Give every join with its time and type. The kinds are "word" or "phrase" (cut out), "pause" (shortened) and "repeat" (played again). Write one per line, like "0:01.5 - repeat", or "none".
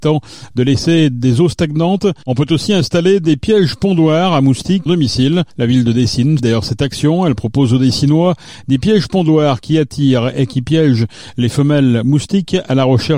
0:04.9 - phrase
0:05.5 - pause
0:06.4 - word

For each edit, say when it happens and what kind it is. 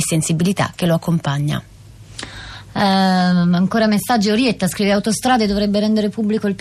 none

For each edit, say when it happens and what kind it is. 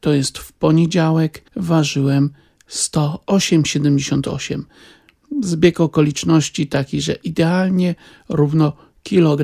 0:01.5 - pause

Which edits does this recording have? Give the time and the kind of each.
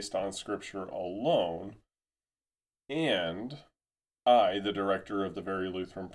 none

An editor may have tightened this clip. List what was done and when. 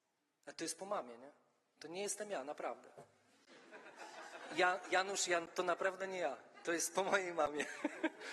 none

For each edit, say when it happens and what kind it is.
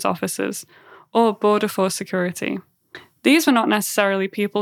none

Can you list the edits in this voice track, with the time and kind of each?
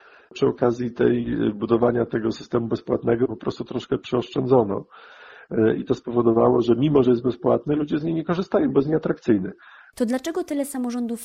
none

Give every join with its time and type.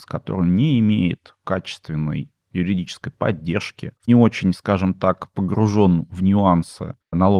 0:04.1 - word

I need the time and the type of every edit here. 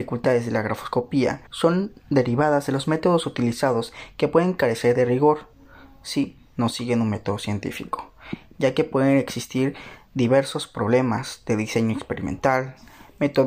0:01.5 - pause

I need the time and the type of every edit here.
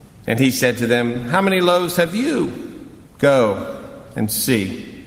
0:03.1 - pause

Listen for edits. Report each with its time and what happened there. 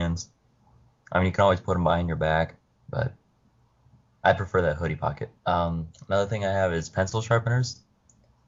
0:02.8 - pause
0:05.4 - pause

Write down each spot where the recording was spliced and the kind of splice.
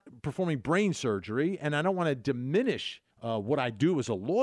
0:03.1 - pause

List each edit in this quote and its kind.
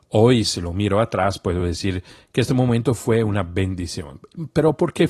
none

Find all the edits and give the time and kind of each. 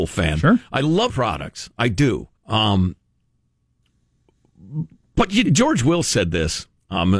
0:01.1 - word
0:02.4 - pause
0:05.4 - word

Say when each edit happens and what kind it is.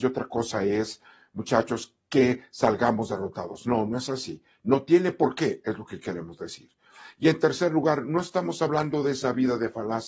none

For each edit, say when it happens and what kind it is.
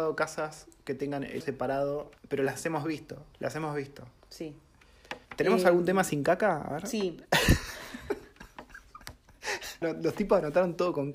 0:01.4 - word
0:02.2 - pause
0:03.3 - pause
0:05.2 - pause
0:09.8 - word

